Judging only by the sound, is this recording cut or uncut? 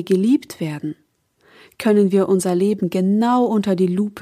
uncut